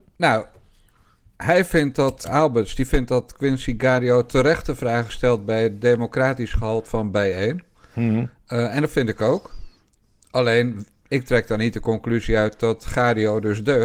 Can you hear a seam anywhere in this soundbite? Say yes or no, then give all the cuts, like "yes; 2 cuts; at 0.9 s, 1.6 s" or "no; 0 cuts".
yes; 2 cuts; at 2.2 s, 6.9 s